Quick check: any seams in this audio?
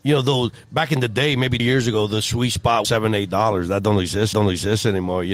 yes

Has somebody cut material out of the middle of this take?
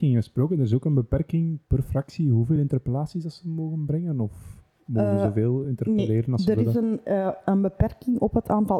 no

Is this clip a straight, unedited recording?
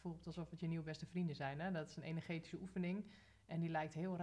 yes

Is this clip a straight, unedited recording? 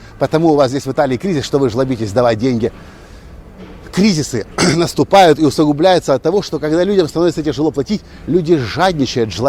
yes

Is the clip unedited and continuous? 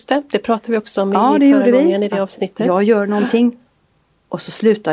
yes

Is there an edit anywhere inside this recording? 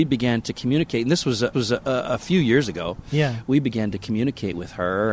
yes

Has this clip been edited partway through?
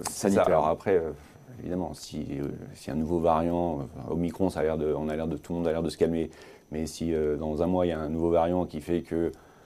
no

